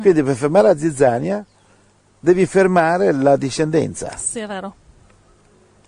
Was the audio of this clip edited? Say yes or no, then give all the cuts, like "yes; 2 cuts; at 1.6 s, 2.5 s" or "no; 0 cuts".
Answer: no; 0 cuts